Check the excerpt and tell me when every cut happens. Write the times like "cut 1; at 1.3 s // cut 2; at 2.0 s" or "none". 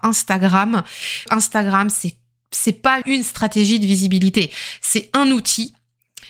cut 1; at 1.3 s // cut 2; at 3.0 s